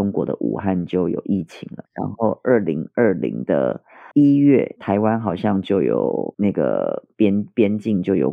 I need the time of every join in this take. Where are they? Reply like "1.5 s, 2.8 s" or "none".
1.8 s

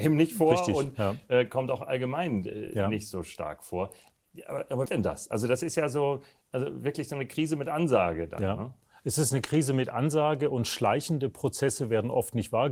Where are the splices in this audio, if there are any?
4.9 s

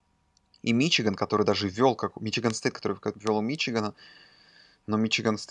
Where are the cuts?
3.1 s

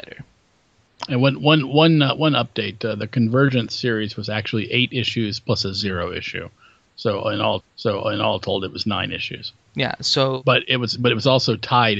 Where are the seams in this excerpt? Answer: 7.6 s

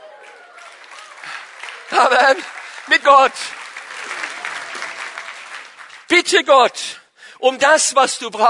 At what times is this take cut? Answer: 3.0 s, 6.0 s

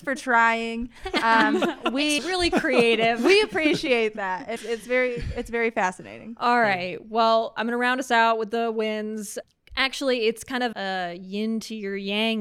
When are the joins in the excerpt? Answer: 2.2 s, 4.6 s, 7.6 s, 10.7 s

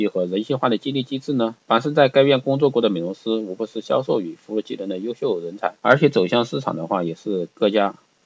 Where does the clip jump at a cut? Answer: 5.8 s

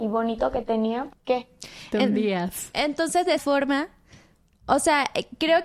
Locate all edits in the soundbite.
1.1 s, 3.4 s

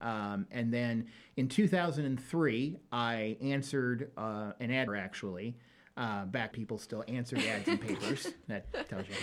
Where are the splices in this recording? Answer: 4.9 s, 6.5 s

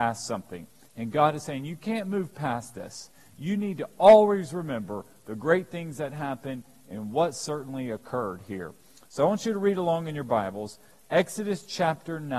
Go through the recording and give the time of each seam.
none

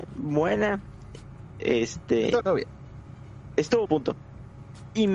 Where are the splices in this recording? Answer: 2.4 s, 3.9 s

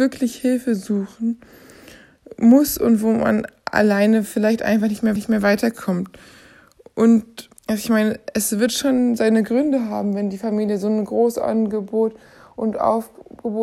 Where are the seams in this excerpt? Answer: 5.2 s, 7.6 s

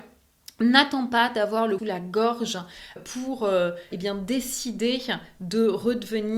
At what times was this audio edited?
1.8 s, 3.0 s, 3.9 s

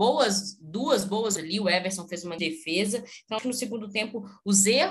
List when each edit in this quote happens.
1.4 s, 2.4 s, 3.4 s

